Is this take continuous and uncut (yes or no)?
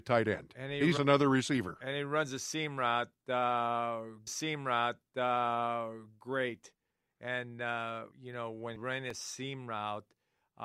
no